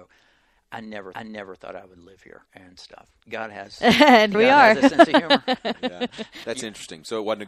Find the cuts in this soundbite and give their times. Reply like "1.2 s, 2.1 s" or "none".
1.1 s, 2.5 s, 3.2 s, 4.3 s, 6.4 s